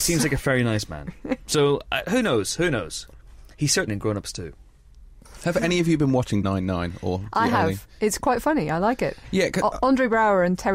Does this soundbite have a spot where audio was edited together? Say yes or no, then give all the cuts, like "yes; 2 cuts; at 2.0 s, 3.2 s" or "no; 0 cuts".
yes; 2 cuts; at 3.9 s, 6.4 s